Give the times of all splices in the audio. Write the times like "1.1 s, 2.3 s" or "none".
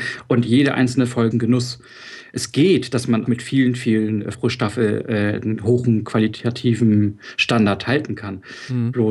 1.3 s, 3.3 s, 4.3 s, 7.8 s